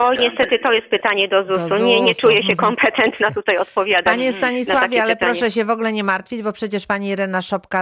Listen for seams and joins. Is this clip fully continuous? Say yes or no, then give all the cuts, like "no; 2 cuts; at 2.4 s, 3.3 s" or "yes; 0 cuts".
yes; 0 cuts